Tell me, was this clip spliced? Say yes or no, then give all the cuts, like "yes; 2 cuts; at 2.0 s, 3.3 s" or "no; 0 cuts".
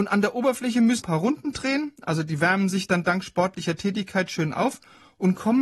yes; 1 cut; at 1.0 s